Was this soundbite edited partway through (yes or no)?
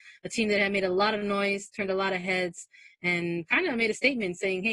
no